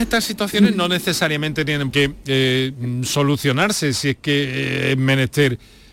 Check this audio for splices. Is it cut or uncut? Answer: cut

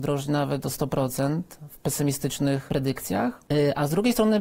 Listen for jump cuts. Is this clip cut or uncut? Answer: uncut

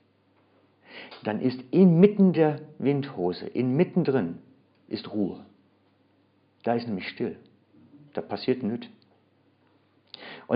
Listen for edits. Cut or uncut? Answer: uncut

